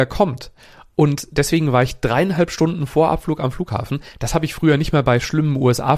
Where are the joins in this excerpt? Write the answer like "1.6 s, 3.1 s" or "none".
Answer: none